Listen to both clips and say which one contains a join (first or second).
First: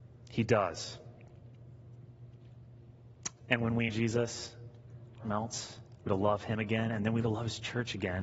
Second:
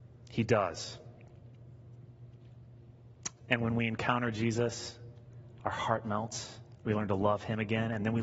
first